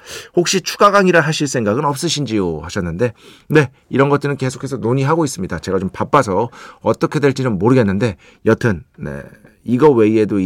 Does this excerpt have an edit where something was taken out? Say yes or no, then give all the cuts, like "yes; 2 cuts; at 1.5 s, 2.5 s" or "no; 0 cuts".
no; 0 cuts